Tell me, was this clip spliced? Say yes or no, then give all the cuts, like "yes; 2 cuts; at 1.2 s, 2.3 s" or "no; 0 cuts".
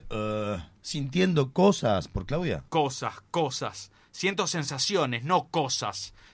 yes; 1 cut; at 2.7 s